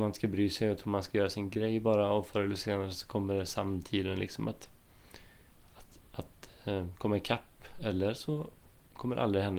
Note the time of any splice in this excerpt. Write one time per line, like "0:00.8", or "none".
none